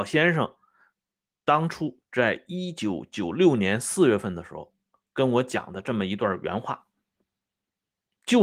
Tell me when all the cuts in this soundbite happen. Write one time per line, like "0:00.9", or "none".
none